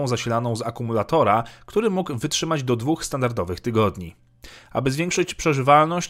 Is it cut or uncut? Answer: uncut